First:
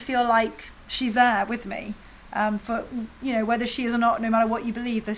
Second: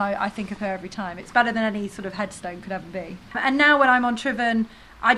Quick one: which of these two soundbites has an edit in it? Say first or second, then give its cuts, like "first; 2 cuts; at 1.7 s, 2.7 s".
second; 1 cut; at 3.3 s